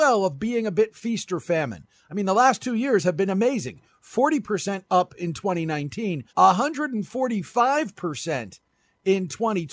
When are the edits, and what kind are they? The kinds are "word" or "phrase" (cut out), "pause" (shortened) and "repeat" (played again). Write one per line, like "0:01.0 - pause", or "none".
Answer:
0:06.3 - pause